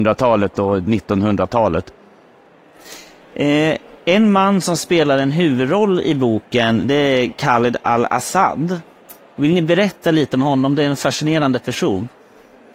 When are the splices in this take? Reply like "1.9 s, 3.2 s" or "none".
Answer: none